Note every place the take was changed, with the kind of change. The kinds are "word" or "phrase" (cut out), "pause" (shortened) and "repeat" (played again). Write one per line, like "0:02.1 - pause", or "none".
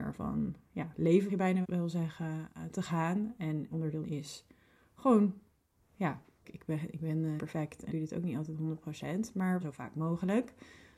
0:01.3 - word
0:01.6 - word
0:03.7 - word
0:04.0 - word
0:06.4 - word
0:07.4 - word
0:07.9 - word
0:09.6 - word